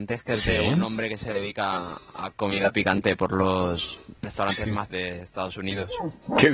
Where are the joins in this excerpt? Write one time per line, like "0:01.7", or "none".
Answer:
0:02.3
0:04.2
0:04.9